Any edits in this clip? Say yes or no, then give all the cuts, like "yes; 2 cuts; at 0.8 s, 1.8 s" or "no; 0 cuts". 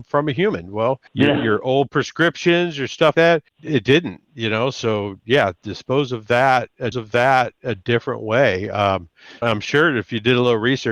yes; 6 cuts; at 1.1 s, 3.1 s, 3.5 s, 5.6 s, 6.9 s, 9.4 s